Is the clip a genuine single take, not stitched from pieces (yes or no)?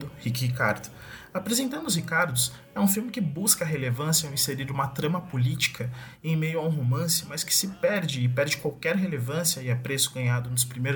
yes